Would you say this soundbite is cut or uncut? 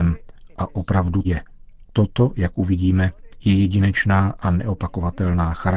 cut